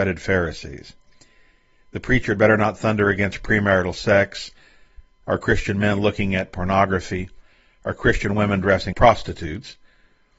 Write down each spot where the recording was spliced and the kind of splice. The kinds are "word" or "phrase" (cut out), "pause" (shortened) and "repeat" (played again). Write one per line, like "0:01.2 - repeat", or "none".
0:08.9 - word